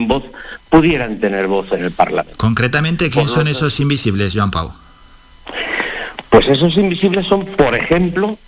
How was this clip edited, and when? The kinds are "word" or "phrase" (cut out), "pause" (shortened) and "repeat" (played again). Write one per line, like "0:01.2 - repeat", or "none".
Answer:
none